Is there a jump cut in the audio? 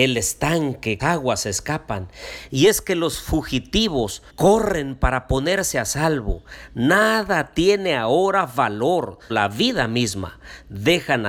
yes; 3 cuts; at 1.0 s, 4.3 s, 9.3 s

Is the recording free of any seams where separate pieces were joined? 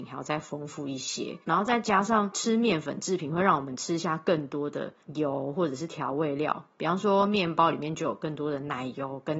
no; 2 cuts; at 1.4 s, 5.0 s

